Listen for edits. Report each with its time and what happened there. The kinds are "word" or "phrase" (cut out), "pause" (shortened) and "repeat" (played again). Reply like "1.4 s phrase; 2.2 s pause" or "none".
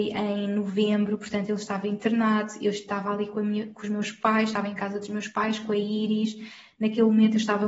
none